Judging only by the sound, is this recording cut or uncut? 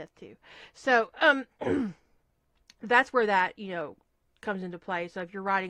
uncut